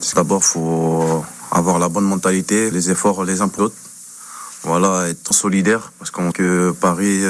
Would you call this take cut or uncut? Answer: cut